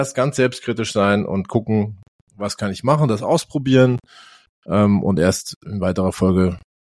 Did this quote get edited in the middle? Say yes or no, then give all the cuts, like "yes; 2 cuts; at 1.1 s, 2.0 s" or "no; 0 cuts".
no; 0 cuts